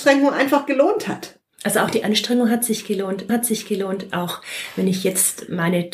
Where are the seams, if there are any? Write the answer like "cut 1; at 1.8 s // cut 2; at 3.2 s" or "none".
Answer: cut 1; at 3.3 s